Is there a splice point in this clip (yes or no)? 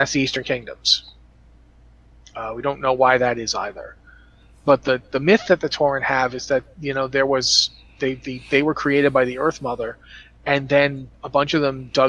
no